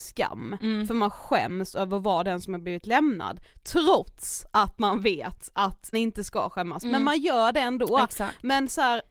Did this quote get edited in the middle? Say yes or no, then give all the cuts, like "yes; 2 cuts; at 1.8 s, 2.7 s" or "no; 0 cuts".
yes; 1 cut; at 5.9 s